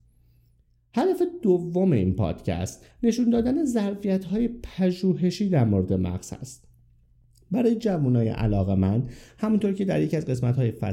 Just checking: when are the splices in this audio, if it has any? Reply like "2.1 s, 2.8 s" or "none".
2.9 s

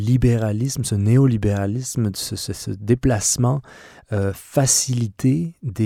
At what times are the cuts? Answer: none

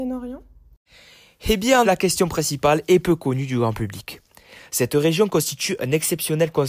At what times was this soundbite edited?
1.8 s

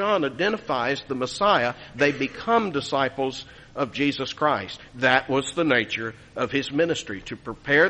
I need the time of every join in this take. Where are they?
none

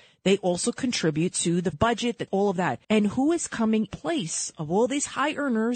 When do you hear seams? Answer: 1.7 s, 2.3 s, 2.8 s, 3.9 s

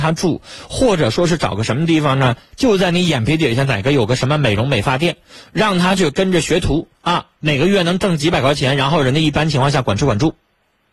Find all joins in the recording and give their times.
7.0 s

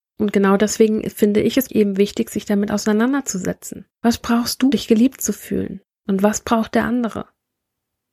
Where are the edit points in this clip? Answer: 1.7 s, 3.9 s, 4.7 s

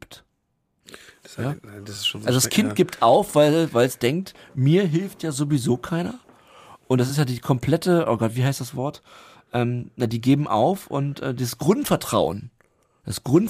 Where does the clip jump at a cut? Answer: none

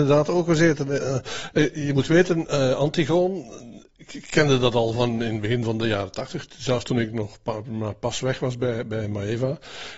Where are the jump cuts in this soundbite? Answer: none

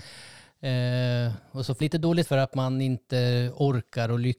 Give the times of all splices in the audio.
1.8 s, 2.2 s

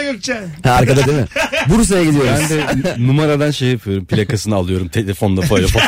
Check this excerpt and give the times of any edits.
1.1 s

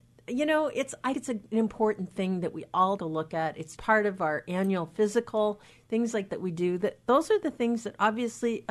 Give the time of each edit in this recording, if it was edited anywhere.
1.1 s, 3.0 s, 3.8 s, 6.3 s

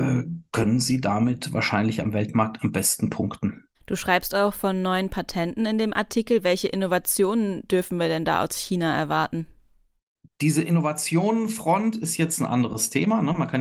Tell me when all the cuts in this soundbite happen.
3.7 s

